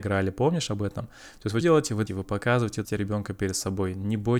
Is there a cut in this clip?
yes; 3 cuts; at 1.6 s, 2.1 s, 2.8 s

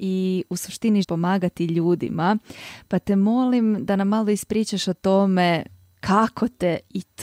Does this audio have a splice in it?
yes; 1 cut; at 1.0 s

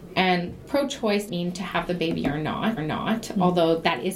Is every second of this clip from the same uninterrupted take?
no; 2 cuts; at 1.3 s, 2.8 s

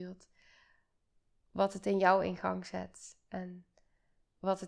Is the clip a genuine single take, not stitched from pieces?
yes; 0 cuts

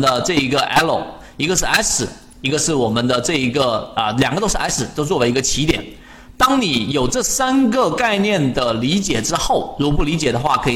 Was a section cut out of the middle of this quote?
no; 0 cuts

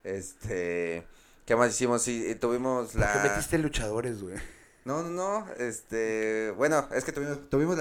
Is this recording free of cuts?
yes; 0 cuts

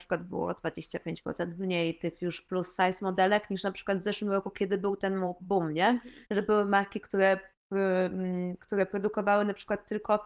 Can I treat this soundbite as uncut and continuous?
no; 1 cut; at 6.2 s

